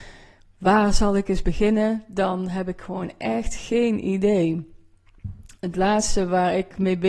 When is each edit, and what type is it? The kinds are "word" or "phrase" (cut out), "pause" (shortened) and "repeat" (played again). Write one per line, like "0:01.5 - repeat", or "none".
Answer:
none